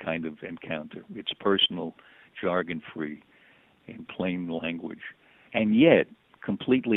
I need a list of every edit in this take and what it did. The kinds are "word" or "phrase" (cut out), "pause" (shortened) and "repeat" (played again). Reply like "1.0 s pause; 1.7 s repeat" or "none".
1.0 s word

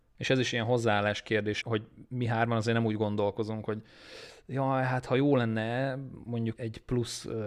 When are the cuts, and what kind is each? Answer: 1.6 s word; 6.6 s word

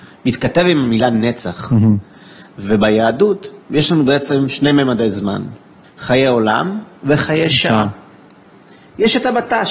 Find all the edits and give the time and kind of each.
3.6 s pause; 5.8 s pause

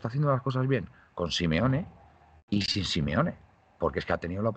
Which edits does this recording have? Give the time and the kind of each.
none

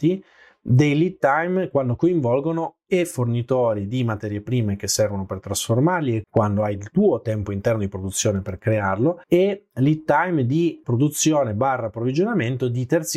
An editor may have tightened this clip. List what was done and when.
6.2 s word; 9.2 s pause; 10.8 s word

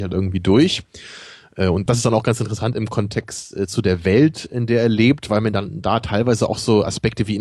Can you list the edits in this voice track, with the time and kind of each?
1.9 s word

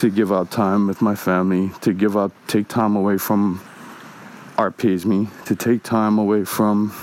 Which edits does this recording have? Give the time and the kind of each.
none

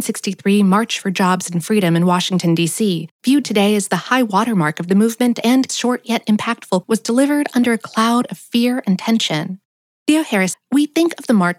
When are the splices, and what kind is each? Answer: 5.7 s word; 6.8 s word; 10.5 s word

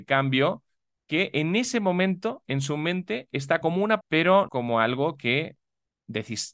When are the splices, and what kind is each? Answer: 2.4 s word; 3.6 s word; 4.0 s word; 4.5 s word

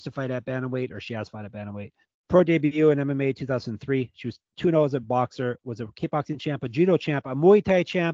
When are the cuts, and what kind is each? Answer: 2.0 s pause

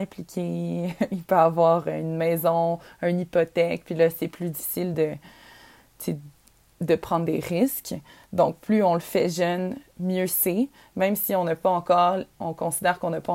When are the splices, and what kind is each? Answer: none

